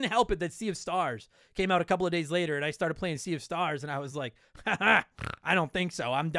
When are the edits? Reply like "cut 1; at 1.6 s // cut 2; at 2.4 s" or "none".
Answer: none